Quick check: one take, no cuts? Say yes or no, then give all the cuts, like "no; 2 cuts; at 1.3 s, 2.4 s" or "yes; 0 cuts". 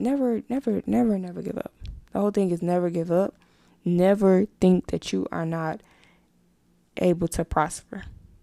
yes; 0 cuts